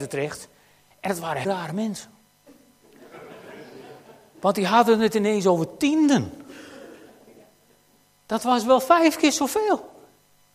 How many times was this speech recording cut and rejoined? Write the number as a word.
one